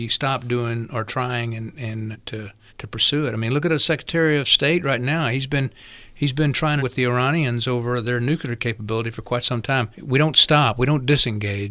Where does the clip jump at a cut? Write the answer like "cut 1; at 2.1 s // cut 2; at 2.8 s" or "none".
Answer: cut 1; at 2.1 s // cut 2; at 2.7 s // cut 3; at 6.8 s // cut 4; at 9.9 s